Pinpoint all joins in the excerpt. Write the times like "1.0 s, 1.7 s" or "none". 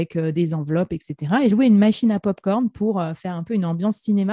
1.5 s

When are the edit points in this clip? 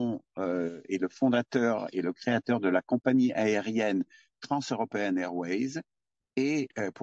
none

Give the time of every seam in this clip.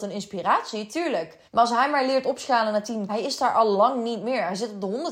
1.5 s, 3.1 s

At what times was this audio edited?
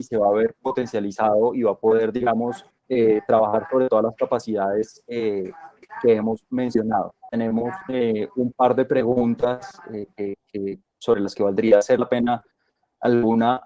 2.7 s, 5.8 s

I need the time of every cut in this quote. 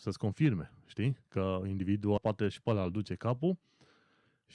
1.2 s, 2.2 s

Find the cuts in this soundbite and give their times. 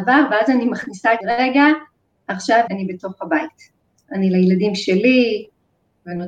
1.2 s, 2.7 s

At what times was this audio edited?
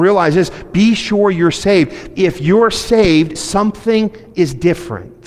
3.4 s

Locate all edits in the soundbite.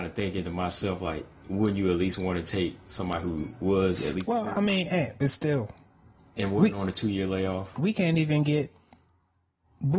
none

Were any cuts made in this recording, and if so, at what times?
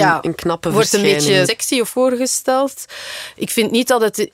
1.4 s, 1.9 s

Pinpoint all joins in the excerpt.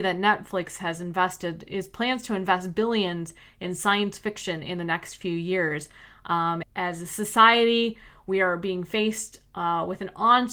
6.6 s

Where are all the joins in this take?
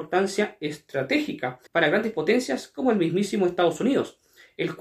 1.7 s

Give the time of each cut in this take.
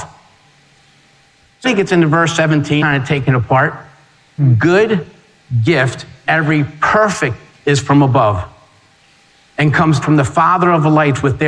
1.6 s, 2.8 s, 4.4 s, 6.3 s, 7.6 s, 10.0 s

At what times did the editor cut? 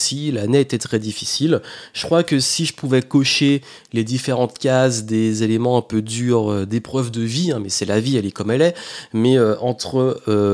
none

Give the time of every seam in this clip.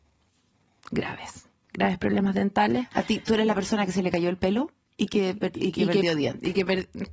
1.5 s

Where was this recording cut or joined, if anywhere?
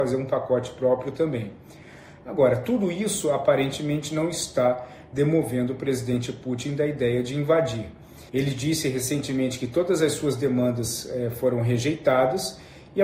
8.3 s

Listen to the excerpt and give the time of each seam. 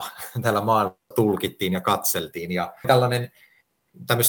1.1 s, 2.8 s

